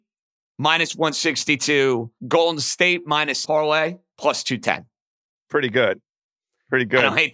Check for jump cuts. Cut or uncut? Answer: cut